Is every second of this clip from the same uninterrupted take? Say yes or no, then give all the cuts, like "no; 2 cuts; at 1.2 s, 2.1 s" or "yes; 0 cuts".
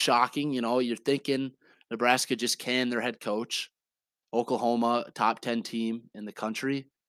yes; 0 cuts